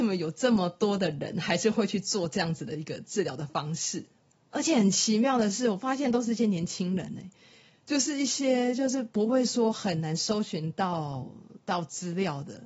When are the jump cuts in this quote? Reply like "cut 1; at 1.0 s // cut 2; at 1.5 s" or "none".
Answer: none